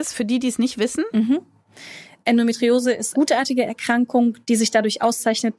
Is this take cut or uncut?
cut